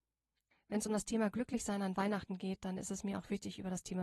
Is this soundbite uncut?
yes; 0 cuts

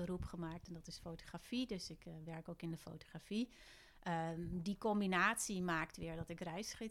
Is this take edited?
no; 0 cuts

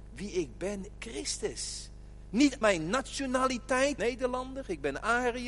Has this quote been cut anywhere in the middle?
yes; 3 cuts; at 0.9 s, 2.6 s, 4.0 s

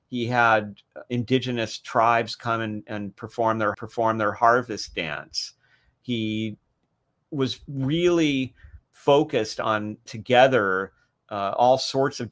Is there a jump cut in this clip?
yes; 2 cuts; at 3.7 s, 10.1 s

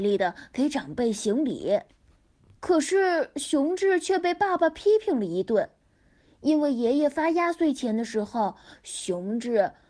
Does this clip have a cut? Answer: no; 0 cuts

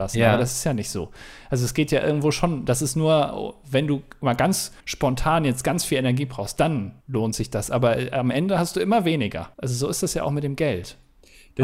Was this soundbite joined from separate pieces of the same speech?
yes; 3 cuts; at 4.8 s, 7.0 s, 9.5 s

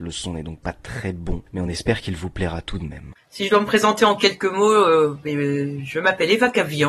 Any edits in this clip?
no; 0 cuts

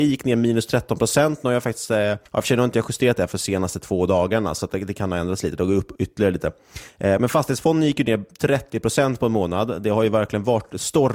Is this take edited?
yes; 1 cut; at 2.3 s

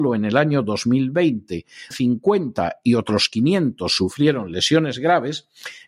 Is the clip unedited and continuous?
no; 1 cut; at 1.9 s

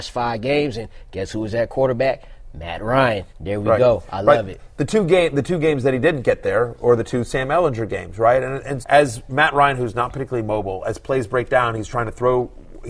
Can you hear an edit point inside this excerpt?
yes; 2 cuts; at 3.3 s, 8.8 s

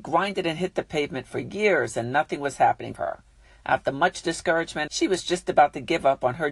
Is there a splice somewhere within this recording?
yes; 2 cuts; at 3.0 s, 4.9 s

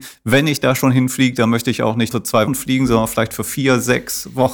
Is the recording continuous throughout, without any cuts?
no; 2 cuts; at 2.1 s, 2.5 s

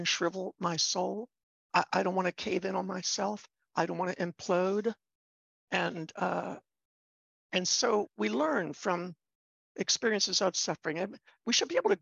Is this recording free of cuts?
no; 1 cut; at 8.0 s

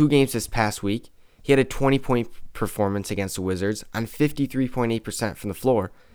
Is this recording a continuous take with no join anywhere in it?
yes; 0 cuts

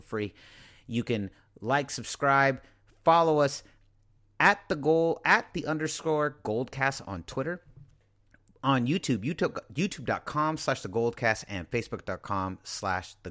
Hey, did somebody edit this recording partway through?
no; 0 cuts

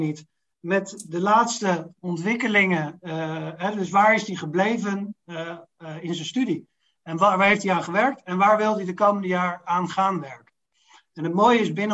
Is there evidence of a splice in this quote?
no; 0 cuts

